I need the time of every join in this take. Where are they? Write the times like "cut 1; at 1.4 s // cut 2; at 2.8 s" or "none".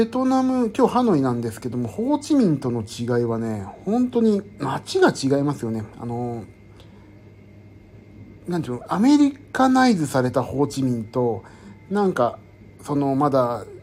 none